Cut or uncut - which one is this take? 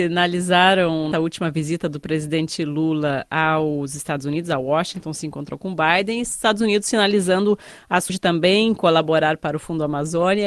cut